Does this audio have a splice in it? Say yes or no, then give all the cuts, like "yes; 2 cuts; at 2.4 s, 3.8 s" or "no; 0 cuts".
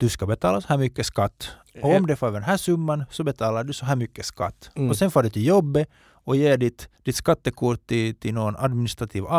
yes; 1 cut; at 6.9 s